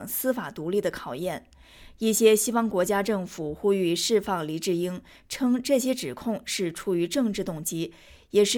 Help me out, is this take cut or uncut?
uncut